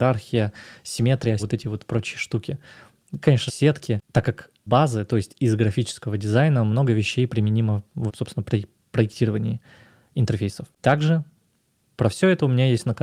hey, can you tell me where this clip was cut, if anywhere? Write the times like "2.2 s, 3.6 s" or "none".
1.4 s, 3.5 s, 4.7 s, 8.1 s